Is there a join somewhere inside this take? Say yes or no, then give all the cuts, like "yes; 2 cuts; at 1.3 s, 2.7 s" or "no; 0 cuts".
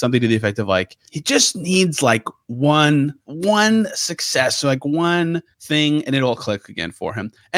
yes; 3 cuts; at 1.1 s, 3.2 s, 5.5 s